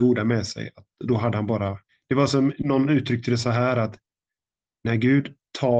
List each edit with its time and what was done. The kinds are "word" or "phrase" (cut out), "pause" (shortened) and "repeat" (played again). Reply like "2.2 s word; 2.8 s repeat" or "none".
none